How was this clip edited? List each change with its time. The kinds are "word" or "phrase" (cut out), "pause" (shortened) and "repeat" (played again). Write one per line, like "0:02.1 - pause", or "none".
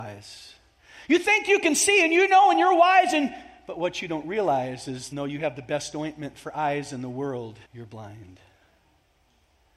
0:05.1 - word
0:07.7 - pause